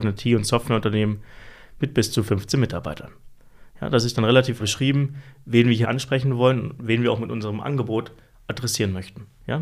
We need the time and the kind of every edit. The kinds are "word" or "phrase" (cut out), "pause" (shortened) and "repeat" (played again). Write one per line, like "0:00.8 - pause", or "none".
0:04.6 - word
0:05.8 - word